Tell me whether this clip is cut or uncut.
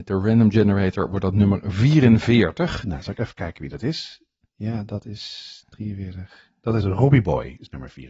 uncut